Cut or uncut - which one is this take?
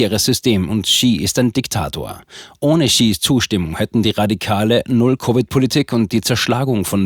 uncut